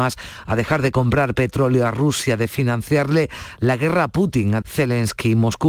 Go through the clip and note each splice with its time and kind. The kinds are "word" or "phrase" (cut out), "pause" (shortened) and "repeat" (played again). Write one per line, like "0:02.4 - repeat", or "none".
0:04.6 - word